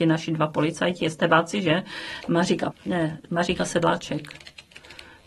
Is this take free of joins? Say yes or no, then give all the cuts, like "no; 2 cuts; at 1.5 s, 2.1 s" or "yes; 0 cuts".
no; 1 cut; at 2.7 s